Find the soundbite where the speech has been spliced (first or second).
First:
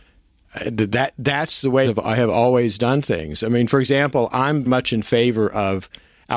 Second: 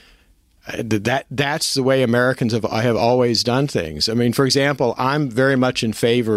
first